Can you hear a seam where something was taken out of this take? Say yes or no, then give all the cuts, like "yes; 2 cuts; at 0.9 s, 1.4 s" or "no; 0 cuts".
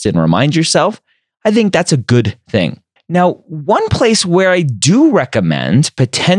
yes; 1 cut; at 3.0 s